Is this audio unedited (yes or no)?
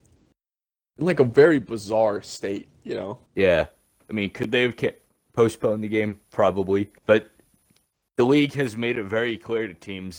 no